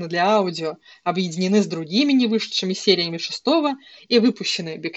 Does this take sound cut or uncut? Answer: uncut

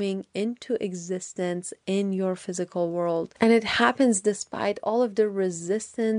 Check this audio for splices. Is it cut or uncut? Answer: uncut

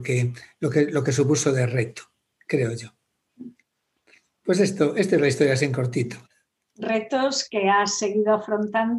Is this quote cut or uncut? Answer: uncut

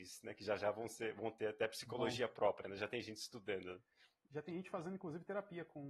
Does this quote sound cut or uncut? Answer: uncut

